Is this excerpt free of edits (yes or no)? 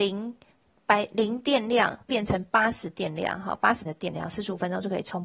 no